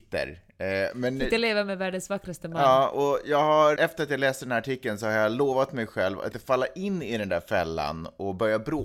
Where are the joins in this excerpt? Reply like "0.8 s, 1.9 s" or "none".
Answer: 3.8 s, 6.3 s